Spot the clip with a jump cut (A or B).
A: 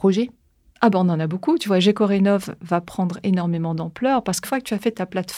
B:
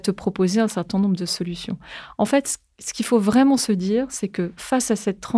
A